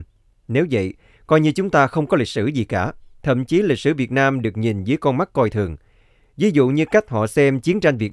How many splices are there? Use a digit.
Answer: 0